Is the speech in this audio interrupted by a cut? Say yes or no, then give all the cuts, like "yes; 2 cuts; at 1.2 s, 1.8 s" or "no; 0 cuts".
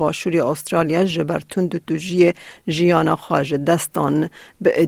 no; 0 cuts